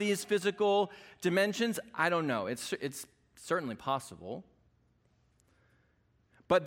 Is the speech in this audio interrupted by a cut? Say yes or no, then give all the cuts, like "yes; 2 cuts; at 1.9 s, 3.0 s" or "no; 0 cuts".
no; 0 cuts